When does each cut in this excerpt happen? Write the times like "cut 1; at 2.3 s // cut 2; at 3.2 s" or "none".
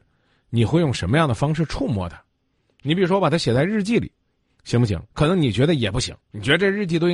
cut 1; at 5.1 s // cut 2; at 6.2 s